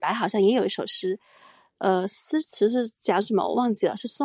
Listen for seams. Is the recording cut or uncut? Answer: uncut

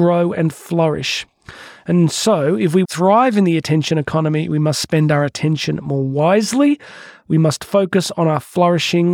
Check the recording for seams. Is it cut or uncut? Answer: cut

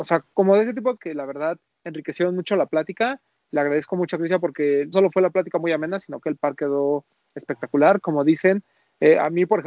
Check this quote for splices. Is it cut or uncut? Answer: cut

